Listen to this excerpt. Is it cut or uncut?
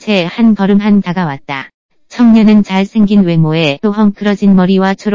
cut